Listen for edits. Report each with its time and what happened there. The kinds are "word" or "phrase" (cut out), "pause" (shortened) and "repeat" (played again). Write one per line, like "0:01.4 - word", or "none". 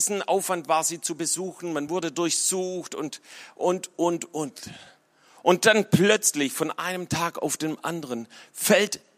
none